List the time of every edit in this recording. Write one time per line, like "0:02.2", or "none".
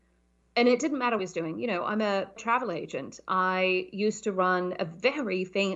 0:01.2
0:02.4